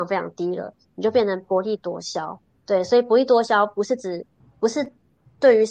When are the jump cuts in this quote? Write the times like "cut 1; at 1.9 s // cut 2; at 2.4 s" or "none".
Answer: cut 1; at 4.4 s